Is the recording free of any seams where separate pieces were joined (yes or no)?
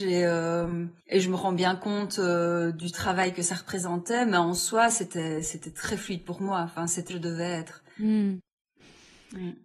no